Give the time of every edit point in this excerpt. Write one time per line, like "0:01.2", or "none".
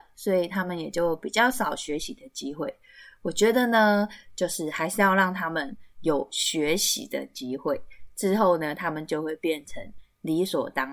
none

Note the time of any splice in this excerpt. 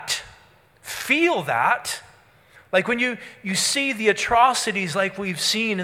none

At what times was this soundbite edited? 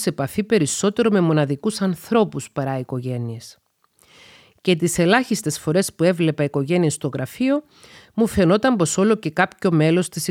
none

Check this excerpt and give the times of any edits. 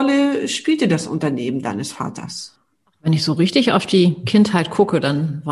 none

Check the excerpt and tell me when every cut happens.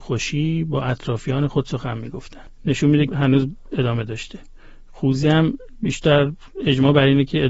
0:03.1

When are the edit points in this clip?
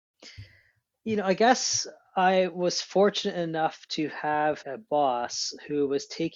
0:01.0
0:04.6

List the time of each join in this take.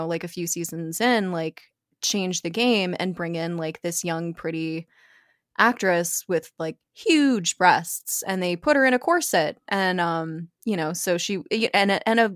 none

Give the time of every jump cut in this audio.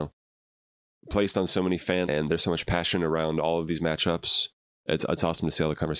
0:02.0

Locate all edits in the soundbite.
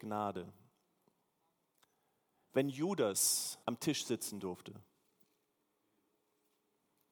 0:03.6

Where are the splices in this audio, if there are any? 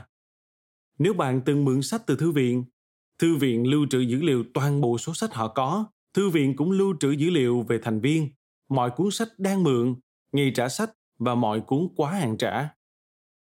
0:05.9

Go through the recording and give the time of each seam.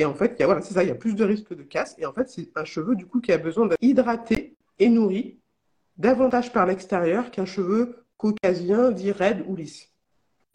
none

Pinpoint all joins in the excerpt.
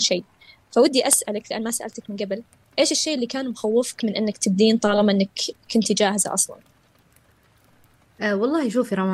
none

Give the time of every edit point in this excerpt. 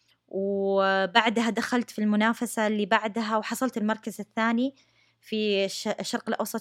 none

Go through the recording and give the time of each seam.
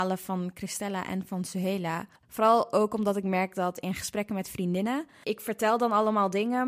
0:02.2

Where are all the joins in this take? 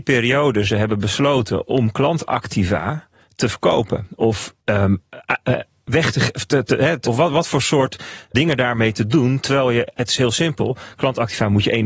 0:04.6
0:07.1
0:08.3

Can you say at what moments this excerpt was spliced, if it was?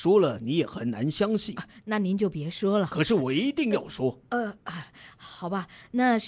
0:04.6

